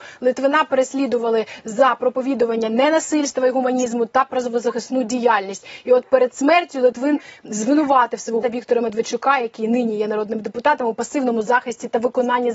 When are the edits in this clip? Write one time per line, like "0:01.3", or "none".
0:08.4